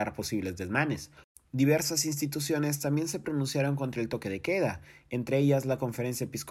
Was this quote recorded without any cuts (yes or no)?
yes